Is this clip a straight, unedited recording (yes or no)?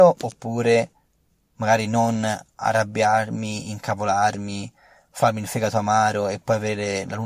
yes